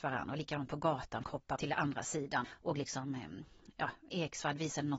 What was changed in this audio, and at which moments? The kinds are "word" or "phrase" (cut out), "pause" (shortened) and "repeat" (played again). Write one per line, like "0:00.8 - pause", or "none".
0:01.2 - word
0:01.6 - word
0:02.4 - word
0:04.1 - word